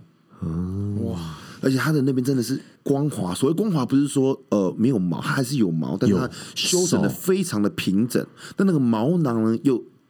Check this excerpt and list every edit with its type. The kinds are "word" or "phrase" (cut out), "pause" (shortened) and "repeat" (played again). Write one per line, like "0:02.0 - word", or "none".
0:02.7 - pause

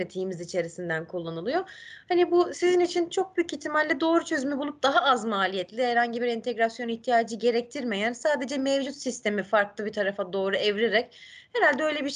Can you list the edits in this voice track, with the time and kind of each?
none

